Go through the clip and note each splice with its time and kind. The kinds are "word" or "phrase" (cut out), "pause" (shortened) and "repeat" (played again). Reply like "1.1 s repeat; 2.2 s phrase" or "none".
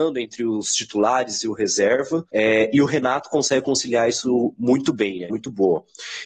2.3 s pause; 5.3 s phrase

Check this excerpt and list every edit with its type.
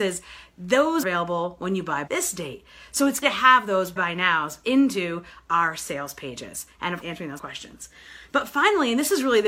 1.0 s word; 2.1 s word; 3.2 s word; 4.0 s word; 4.6 s word; 7.0 s word; 7.4 s word

